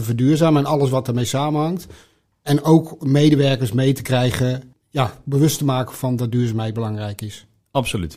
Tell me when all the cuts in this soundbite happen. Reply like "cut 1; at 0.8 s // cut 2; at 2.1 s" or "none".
none